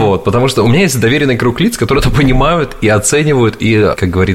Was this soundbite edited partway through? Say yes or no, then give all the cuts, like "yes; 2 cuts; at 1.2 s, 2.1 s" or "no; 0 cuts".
no; 0 cuts